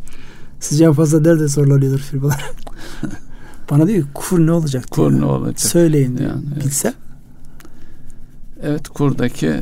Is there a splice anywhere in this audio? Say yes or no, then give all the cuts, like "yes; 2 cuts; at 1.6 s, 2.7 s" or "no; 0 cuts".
no; 0 cuts